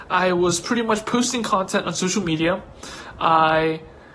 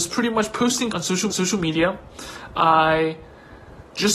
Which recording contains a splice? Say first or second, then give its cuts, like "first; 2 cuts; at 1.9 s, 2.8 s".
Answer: second; 2 cuts; at 0.9 s, 1.3 s